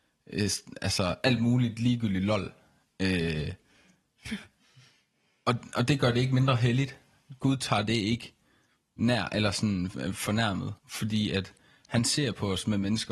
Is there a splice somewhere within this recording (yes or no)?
yes